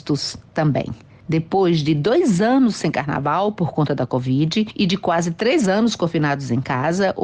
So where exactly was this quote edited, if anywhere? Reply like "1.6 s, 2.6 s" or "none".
none